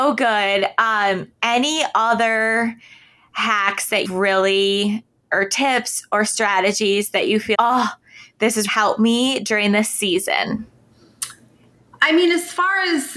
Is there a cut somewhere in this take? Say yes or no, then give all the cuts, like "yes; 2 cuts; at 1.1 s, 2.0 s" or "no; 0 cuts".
yes; 4 cuts; at 1.4 s, 4.0 s, 7.5 s, 8.7 s